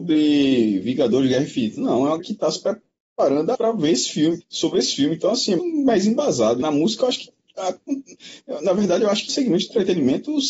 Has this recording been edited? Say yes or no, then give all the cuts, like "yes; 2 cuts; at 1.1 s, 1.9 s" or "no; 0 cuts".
yes; 6 cuts; at 2.2 s, 3.5 s, 4.4 s, 5.6 s, 6.6 s, 9.3 s